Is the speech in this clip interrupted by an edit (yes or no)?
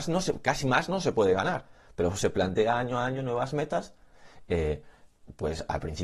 no